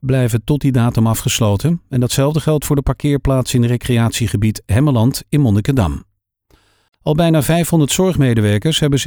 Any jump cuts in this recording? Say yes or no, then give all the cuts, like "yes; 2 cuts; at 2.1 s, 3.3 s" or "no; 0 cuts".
no; 0 cuts